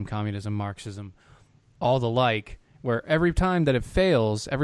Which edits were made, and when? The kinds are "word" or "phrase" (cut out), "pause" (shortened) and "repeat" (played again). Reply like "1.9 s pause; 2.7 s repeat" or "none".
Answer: none